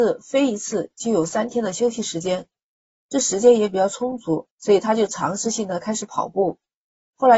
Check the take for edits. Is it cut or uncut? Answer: cut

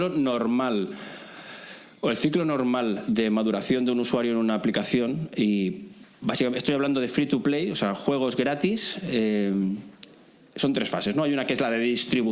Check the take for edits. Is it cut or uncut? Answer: uncut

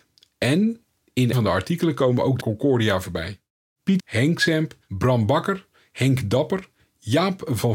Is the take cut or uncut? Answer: cut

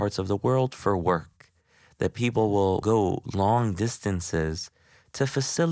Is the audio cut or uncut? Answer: uncut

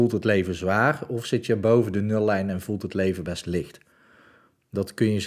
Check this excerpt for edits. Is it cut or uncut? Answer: uncut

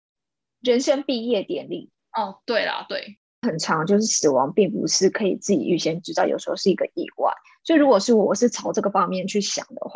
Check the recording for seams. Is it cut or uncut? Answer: uncut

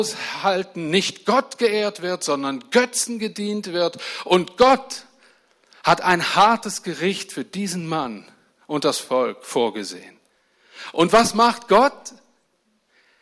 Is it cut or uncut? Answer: uncut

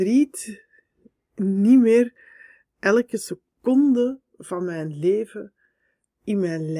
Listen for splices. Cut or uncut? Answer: uncut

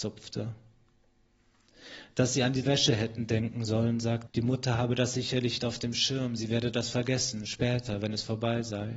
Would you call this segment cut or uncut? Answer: cut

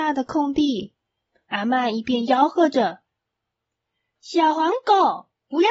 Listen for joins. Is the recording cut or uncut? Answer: uncut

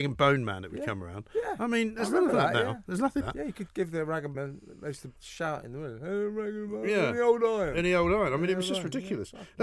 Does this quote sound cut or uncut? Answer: cut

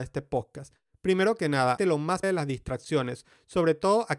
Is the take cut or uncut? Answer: cut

